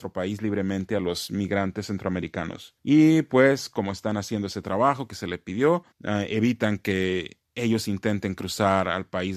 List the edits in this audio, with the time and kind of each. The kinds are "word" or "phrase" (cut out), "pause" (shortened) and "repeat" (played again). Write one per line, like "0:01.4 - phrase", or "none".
0:02.8 - pause
0:05.9 - pause